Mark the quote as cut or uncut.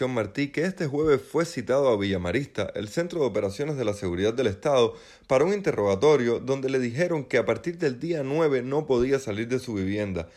uncut